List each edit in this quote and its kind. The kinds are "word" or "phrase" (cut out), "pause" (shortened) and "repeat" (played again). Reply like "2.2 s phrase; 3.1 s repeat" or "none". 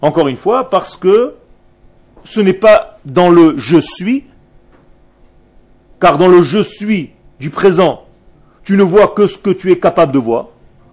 none